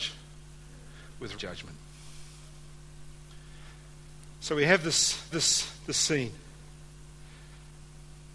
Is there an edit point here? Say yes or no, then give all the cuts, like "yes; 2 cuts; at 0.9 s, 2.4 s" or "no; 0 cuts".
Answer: yes; 2 cuts; at 1.3 s, 5.3 s